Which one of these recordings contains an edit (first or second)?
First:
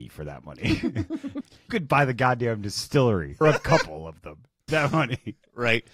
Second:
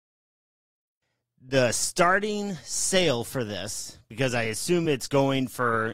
first